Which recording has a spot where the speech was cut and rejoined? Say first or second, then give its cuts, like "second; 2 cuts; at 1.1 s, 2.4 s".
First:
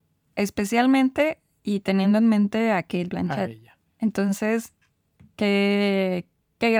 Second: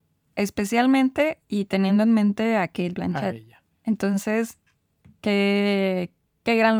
second; 1 cut; at 1.4 s